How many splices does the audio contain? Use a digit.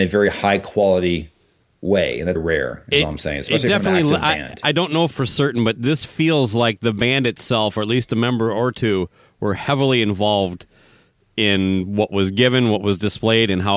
2